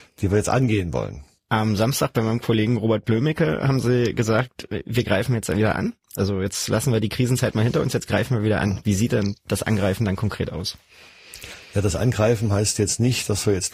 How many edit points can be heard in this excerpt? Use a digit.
0